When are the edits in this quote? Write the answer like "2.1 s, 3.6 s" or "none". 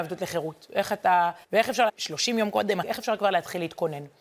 1.4 s, 1.9 s, 2.8 s